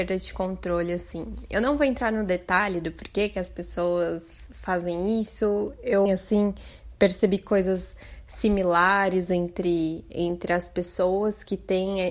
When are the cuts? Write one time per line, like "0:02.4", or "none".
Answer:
0:06.1

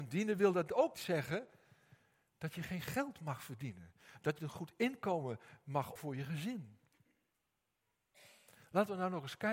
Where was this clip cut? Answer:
0:00.9
0:04.4
0:06.0

